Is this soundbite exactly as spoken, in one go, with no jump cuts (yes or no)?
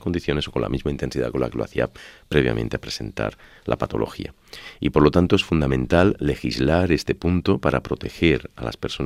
yes